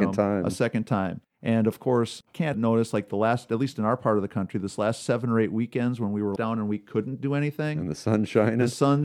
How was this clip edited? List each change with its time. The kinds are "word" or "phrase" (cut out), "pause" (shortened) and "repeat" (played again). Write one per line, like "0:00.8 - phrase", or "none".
0:02.5 - phrase
0:06.4 - word